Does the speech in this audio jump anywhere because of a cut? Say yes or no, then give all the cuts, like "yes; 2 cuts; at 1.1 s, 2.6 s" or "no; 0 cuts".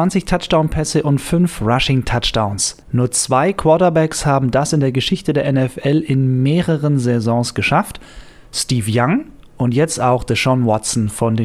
yes; 1 cut; at 2.8 s